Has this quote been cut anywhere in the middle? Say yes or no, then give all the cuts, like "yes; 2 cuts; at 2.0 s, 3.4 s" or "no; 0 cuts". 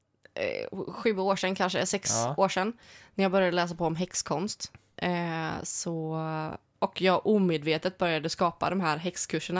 yes; 1 cut; at 6.7 s